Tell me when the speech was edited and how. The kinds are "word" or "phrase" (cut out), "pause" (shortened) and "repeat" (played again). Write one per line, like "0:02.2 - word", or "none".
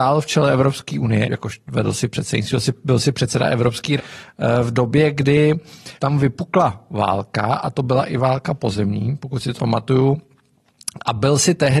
0:01.2 - word
0:04.0 - word
0:06.0 - pause
0:09.6 - word